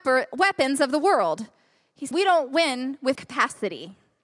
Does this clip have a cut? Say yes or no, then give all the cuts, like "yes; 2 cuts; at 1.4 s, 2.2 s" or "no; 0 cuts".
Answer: yes; 2 cuts; at 2.1 s, 3.1 s